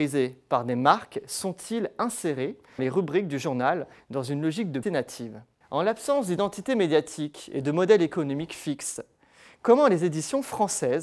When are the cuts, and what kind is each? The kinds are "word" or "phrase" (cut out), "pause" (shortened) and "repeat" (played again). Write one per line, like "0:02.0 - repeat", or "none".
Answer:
0:02.8 - word
0:04.8 - word

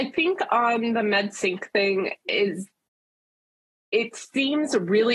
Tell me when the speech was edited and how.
none

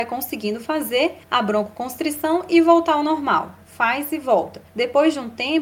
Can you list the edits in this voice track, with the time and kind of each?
0:01.2 - pause
0:04.7 - pause

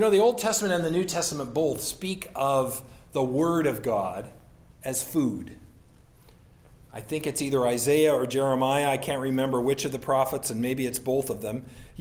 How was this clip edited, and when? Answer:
none

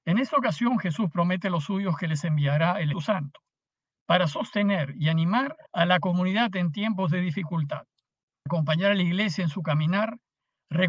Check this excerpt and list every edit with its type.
0:02.9 - word
0:05.7 - pause
0:08.5 - word

